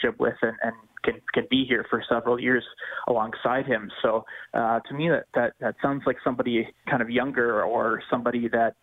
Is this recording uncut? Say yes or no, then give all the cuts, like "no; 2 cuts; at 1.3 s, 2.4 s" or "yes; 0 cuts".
no; 1 cut; at 6.9 s